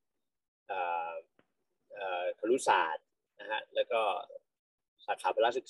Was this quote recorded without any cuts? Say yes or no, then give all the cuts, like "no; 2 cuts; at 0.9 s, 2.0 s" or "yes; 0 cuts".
yes; 0 cuts